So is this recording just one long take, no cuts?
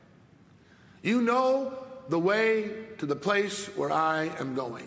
yes; 0 cuts

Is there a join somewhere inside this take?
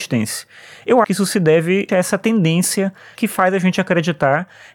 yes; 3 cuts; at 1.0 s, 1.9 s, 3.2 s

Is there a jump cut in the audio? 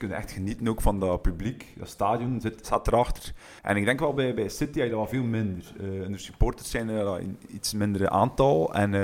yes; 1 cut; at 3.6 s

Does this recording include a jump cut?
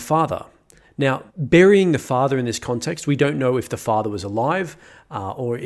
yes; 1 cut; at 1.3 s

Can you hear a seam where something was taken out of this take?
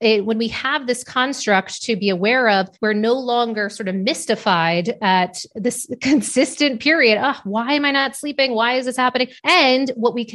yes; 2 cuts; at 2.7 s, 9.4 s

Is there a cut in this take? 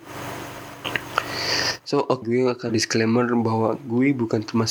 yes; 2 cuts; at 2.2 s, 2.7 s

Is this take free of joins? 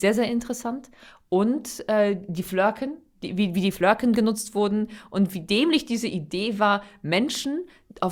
yes; 0 cuts

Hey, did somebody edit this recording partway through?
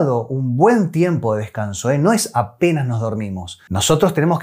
no; 0 cuts

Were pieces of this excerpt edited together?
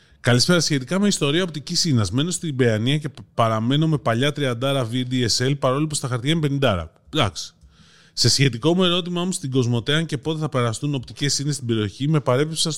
no; 0 cuts

